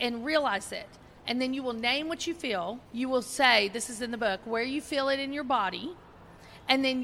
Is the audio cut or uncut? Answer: cut